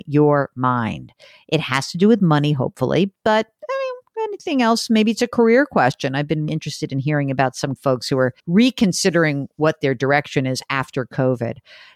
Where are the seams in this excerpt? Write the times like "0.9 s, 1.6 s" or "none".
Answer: 6.5 s, 7.8 s, 8.4 s